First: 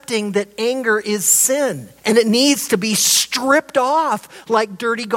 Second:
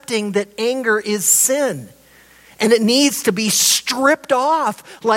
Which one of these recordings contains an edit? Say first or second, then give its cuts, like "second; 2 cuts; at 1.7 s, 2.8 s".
first; 1 cut; at 2.0 s